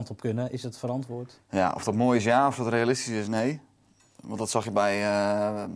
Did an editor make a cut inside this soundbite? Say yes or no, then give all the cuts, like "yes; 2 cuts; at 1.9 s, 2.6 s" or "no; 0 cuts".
no; 0 cuts